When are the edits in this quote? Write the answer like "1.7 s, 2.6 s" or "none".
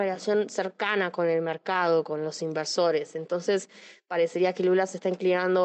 none